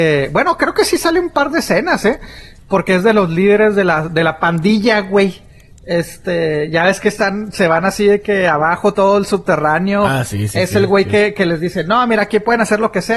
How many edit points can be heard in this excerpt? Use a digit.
1